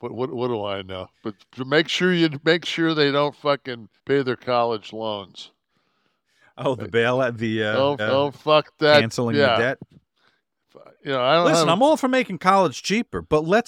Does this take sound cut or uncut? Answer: cut